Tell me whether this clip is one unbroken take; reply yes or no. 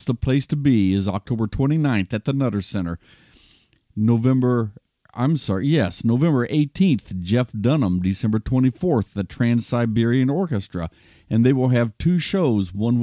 yes